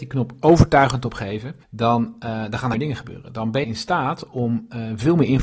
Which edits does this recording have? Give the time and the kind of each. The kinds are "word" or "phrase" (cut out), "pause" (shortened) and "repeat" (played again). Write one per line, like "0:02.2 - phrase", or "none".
0:01.6 - pause
0:02.7 - phrase
0:03.6 - word